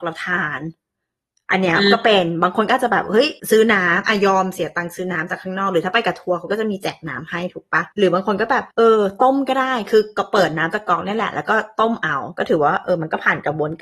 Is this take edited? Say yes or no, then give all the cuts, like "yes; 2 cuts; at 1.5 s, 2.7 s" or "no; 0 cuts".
yes; 3 cuts; at 3.4 s, 7.9 s, 8.7 s